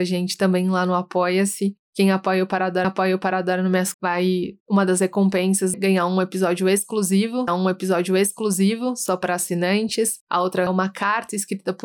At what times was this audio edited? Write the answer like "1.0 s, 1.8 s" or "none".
2.8 s, 3.9 s, 4.6 s, 5.7 s, 7.5 s, 10.7 s